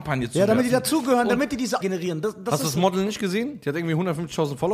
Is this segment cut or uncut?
cut